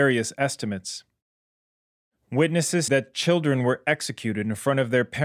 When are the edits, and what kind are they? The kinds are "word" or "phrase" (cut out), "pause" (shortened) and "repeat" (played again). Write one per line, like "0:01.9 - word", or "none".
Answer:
0:02.9 - word

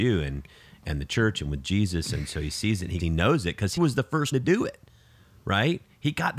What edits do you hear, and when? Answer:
0:03.0 - word
0:03.8 - word
0:04.3 - word

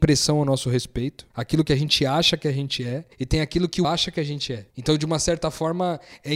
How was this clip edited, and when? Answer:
0:01.3 - pause
0:03.1 - pause
0:03.8 - word
0:04.7 - pause

